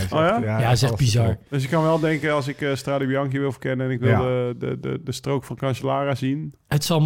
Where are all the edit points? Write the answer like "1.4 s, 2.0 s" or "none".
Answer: none